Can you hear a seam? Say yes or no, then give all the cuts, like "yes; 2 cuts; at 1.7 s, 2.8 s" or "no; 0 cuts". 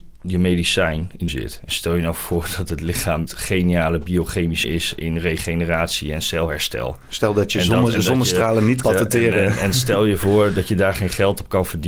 yes; 4 cuts; at 1.3 s, 3.3 s, 4.6 s, 8.8 s